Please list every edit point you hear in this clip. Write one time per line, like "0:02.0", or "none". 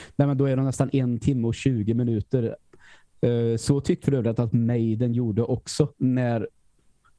0:04.0